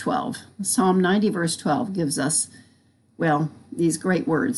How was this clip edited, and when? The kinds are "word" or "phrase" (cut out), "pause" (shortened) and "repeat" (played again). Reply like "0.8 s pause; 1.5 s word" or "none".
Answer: none